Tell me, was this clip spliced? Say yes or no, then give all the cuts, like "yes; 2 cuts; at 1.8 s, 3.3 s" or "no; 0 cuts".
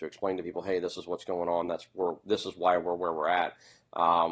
no; 0 cuts